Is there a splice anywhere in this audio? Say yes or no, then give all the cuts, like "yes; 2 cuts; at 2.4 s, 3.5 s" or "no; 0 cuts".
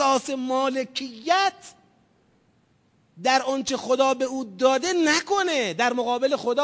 no; 0 cuts